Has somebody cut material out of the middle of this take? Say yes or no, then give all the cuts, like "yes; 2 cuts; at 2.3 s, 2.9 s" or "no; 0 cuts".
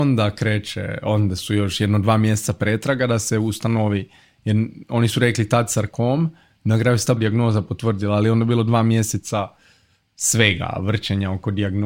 yes; 1 cut; at 7.2 s